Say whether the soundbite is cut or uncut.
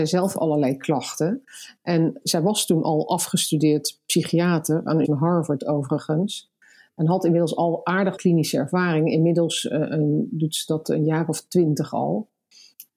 cut